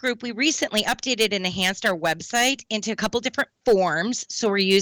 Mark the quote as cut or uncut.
uncut